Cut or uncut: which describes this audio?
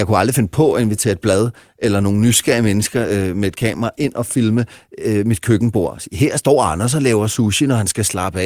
uncut